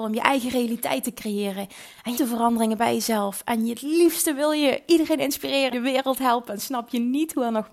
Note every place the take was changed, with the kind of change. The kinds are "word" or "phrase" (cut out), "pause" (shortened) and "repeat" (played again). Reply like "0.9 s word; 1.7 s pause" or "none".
2.1 s phrase; 5.7 s phrase

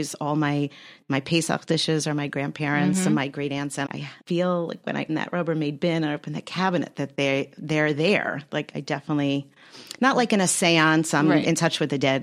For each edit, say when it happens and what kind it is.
3.9 s word; 4.2 s pause; 5.1 s word; 8.7 s word

